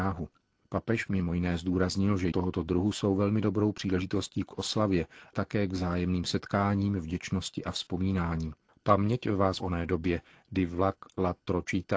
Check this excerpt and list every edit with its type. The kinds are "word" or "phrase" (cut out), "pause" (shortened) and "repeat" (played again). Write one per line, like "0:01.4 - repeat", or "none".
0:02.3 - word
0:05.3 - word
0:08.7 - pause
0:09.6 - phrase